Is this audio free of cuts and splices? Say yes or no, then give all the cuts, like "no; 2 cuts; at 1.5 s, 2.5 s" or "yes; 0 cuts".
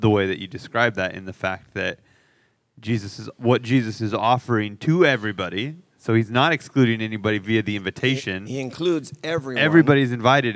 yes; 0 cuts